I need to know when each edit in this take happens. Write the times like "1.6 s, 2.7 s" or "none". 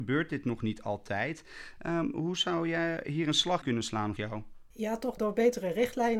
3.6 s, 4.2 s, 4.7 s, 5.2 s